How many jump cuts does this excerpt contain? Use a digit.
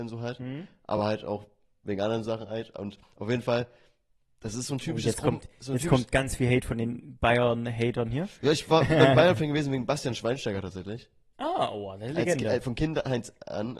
0